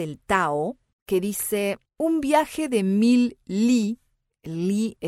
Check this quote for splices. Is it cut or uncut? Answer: uncut